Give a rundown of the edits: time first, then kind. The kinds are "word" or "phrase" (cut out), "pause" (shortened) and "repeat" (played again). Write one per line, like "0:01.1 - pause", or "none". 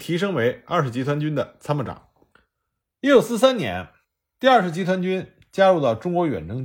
none